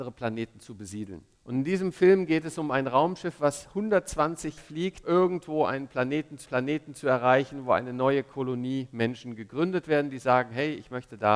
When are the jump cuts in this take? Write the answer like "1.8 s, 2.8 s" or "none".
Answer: 1.3 s, 4.6 s, 5.0 s, 6.5 s